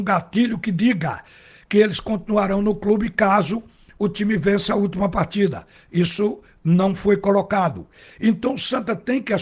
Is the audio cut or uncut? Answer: uncut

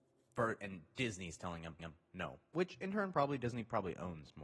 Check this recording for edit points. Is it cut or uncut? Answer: cut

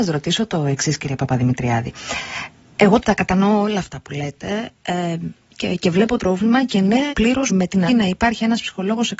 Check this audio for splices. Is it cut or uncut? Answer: cut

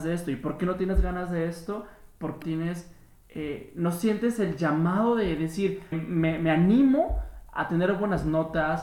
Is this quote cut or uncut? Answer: cut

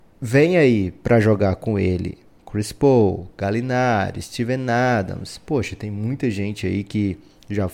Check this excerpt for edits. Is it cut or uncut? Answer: uncut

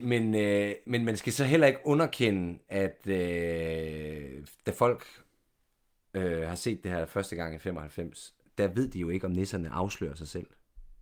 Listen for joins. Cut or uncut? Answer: uncut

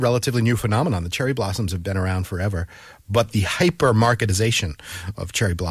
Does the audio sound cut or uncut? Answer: uncut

